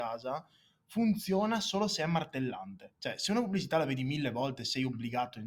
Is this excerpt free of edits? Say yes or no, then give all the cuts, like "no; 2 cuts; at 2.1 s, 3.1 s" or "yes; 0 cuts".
no; 1 cut; at 3.0 s